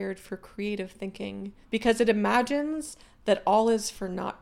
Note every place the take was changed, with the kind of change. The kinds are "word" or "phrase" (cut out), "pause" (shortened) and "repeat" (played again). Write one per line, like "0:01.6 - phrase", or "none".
0:01.6 - pause